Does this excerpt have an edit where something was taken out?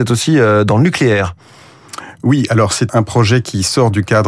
yes; 1 cut; at 2.9 s

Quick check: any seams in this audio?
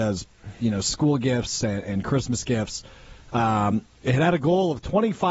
no; 0 cuts

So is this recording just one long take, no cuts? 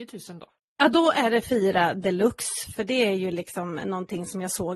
yes; 0 cuts

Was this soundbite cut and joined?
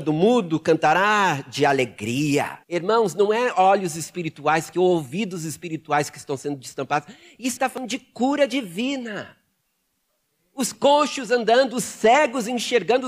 yes; 3 cuts; at 2.6 s, 4.7 s, 7.6 s

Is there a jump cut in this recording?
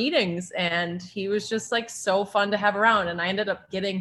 no; 0 cuts

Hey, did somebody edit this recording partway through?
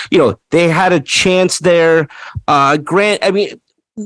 no; 0 cuts

